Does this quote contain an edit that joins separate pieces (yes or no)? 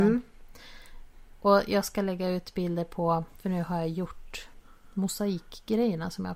no